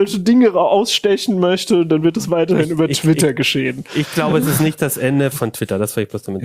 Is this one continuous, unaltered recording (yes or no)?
no